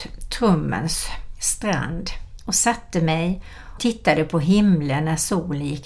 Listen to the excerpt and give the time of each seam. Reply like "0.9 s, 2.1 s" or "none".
3.8 s